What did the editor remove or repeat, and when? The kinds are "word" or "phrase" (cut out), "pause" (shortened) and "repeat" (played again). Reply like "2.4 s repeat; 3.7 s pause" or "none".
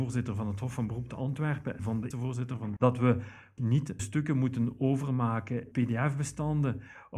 1.8 s word; 2.1 s word; 2.8 s word; 3.6 s word; 4.0 s word; 5.7 s word